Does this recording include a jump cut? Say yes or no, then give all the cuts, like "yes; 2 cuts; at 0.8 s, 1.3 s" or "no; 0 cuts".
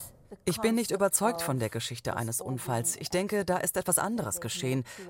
no; 0 cuts